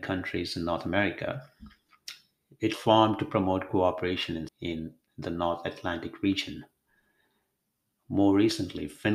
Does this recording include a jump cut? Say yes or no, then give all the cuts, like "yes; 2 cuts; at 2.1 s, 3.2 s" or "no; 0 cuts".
yes; 2 cuts; at 2.7 s, 4.5 s